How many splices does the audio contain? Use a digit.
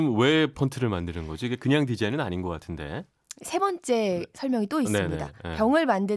0